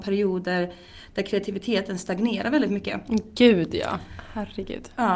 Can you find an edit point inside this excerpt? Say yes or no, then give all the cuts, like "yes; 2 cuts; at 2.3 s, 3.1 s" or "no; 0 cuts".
no; 0 cuts